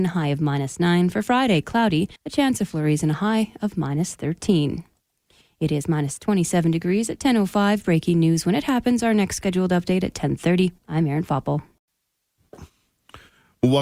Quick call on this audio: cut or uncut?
cut